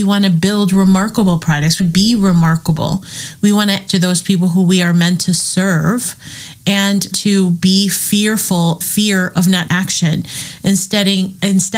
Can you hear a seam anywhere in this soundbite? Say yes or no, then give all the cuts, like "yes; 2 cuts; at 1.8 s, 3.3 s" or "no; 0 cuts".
yes; 5 cuts; at 1.8 s, 3.9 s, 7.1 s, 8.8 s, 9.7 s